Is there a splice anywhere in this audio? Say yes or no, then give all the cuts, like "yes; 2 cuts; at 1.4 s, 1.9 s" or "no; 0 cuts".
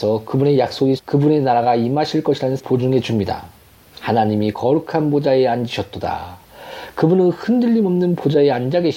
yes; 3 cuts; at 1.0 s, 2.6 s, 4.5 s